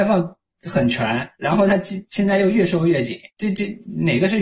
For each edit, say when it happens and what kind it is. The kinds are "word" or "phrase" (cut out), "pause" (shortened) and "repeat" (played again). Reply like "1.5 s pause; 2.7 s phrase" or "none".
1.3 s pause; 2.1 s pause; 3.3 s pause